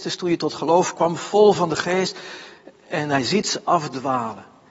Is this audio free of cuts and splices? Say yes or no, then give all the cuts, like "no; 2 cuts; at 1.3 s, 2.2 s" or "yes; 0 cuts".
yes; 0 cuts